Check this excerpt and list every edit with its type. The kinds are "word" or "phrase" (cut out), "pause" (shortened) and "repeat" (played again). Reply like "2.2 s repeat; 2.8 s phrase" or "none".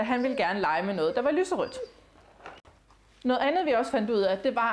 none